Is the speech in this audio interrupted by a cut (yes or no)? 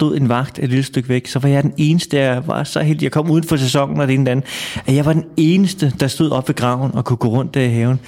no